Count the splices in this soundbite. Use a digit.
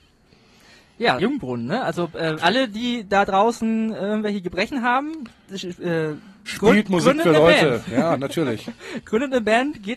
2